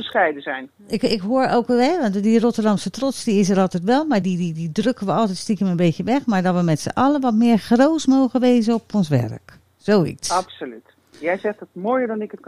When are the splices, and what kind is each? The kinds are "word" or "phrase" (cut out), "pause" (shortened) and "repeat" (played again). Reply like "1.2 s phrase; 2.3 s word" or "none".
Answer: 4.2 s word

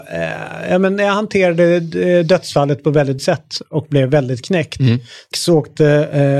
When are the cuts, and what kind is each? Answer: 3.2 s word; 5.3 s phrase

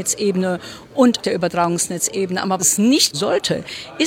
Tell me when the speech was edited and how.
1.2 s word; 2.6 s word; 3.1 s word

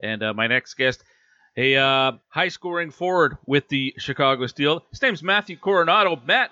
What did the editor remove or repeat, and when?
2.2 s pause

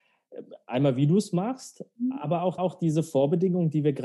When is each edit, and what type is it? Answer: 2.6 s repeat

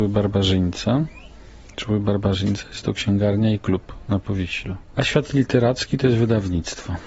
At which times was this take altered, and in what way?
none

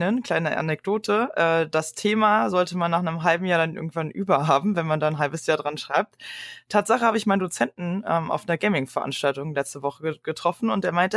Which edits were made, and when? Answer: none

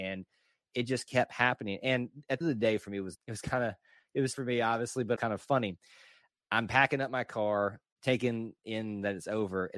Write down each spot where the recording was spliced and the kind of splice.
2.4 s phrase; 3.1 s word; 4.3 s word; 5.2 s word

